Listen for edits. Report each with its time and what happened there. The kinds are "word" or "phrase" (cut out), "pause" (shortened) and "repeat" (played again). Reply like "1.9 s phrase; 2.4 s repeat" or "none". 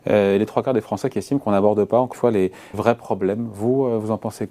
2.1 s word; 2.7 s word